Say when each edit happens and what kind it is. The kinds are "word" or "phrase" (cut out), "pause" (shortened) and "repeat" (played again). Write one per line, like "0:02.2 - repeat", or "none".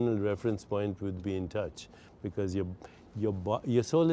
0:01.2 - phrase

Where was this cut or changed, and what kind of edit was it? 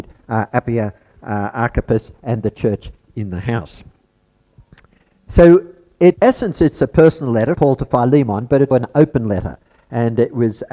0:06.1 - word
0:07.5 - word
0:08.7 - word

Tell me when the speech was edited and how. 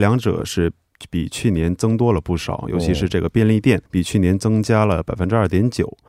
0:03.9 - pause

